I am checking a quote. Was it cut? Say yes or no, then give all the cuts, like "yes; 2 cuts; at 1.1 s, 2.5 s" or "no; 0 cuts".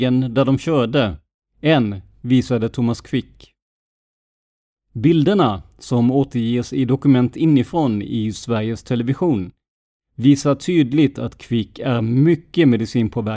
no; 0 cuts